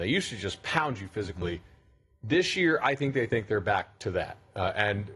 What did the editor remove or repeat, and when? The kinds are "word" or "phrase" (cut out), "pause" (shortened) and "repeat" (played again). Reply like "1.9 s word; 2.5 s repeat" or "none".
none